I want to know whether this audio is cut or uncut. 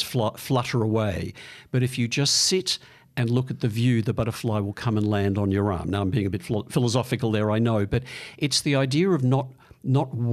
uncut